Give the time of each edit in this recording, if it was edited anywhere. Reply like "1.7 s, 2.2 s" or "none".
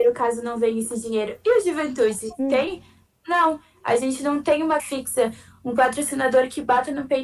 4.8 s